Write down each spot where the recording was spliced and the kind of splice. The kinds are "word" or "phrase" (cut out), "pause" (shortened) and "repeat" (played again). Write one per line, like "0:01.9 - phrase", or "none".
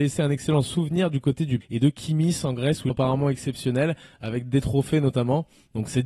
0:01.6 - word
0:02.9 - phrase

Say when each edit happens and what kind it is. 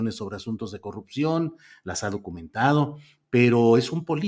none

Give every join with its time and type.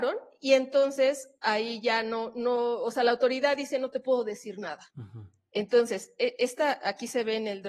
0:04.9 - pause

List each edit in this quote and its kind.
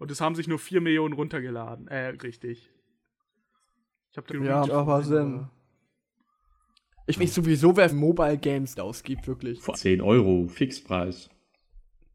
0:02.2 - word
0:04.3 - word
0:04.7 - word
0:07.2 - word
0:07.9 - word
0:08.8 - word
0:09.7 - word

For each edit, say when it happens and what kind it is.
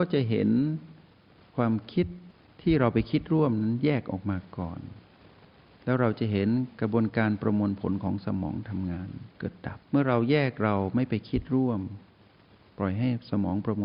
0:09.3 - pause
0:09.8 - pause

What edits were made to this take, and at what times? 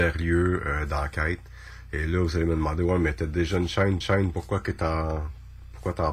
0:04.0 - repeat

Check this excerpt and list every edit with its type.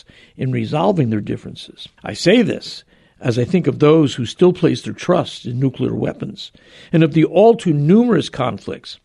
0:02.0 - pause

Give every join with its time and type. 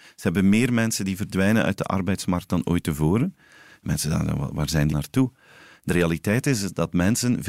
0:04.9 - word

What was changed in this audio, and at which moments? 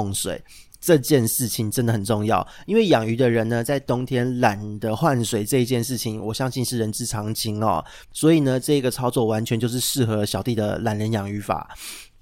0:08.0 - pause

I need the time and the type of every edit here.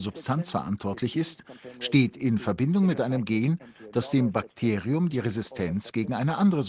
none

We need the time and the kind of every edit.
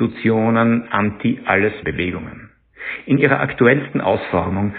0:01.8 - word

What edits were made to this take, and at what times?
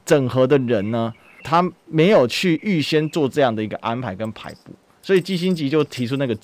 0:01.4 - word

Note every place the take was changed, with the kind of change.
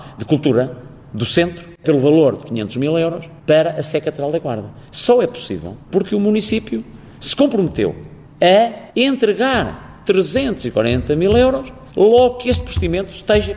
0:03.4 - pause
0:05.8 - pause
0:08.9 - pause
0:11.9 - pause

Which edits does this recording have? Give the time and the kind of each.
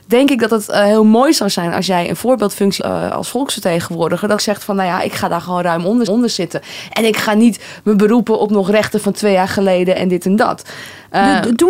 0:02.8 - word
0:04.4 - word
0:06.1 - repeat

